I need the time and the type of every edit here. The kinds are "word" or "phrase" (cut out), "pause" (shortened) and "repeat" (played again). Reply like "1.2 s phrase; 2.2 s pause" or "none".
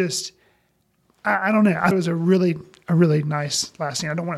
1.9 s word